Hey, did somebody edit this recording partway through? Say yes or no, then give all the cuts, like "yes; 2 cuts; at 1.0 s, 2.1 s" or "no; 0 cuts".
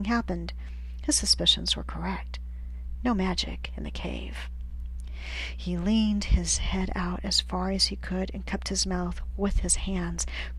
no; 0 cuts